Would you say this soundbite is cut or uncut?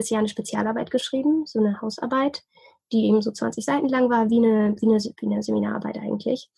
uncut